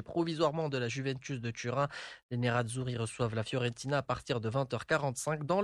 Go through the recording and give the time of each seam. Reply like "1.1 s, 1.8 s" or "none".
none

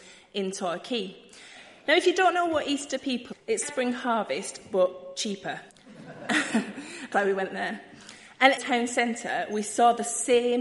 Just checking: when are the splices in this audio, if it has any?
3.3 s, 3.6 s, 5.7 s, 7.1 s, 8.6 s

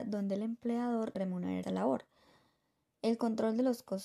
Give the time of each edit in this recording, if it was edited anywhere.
1.1 s, 1.6 s

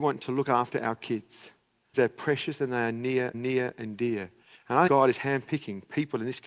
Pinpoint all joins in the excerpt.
1.9 s, 3.3 s, 4.4 s, 4.9 s

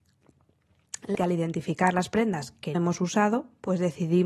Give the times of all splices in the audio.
1.1 s, 2.7 s

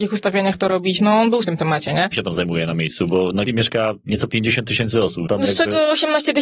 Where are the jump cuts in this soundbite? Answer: 1.4 s, 2.1 s, 3.5 s, 4.3 s, 5.3 s

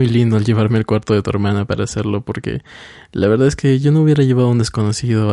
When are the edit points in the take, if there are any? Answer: none

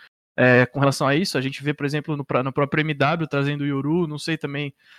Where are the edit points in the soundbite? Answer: 2.5 s

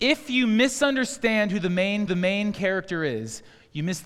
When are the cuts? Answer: 2.1 s

